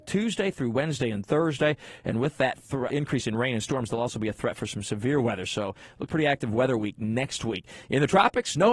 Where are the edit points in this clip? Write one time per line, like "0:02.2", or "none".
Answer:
0:02.9
0:06.1